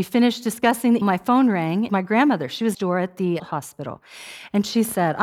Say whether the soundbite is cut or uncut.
cut